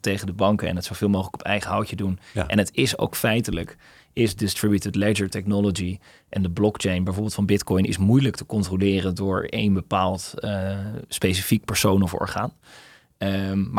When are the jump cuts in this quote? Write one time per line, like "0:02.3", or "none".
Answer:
none